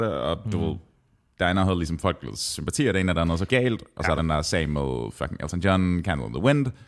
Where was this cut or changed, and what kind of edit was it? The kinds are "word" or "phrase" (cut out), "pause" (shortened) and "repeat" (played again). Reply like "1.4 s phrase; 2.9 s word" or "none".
3.5 s phrase; 4.2 s phrase